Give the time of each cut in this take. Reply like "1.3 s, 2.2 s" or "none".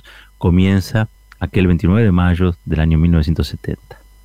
1.1 s